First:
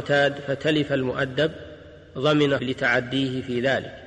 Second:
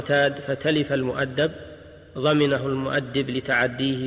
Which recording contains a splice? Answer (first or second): first